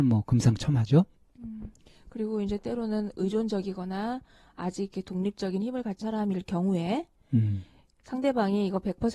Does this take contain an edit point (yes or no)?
yes